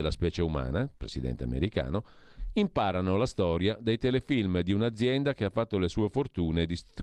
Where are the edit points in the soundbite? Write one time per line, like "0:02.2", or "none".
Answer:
none